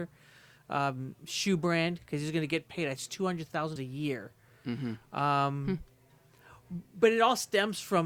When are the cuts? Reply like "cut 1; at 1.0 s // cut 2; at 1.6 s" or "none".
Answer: cut 1; at 3.0 s // cut 2; at 3.8 s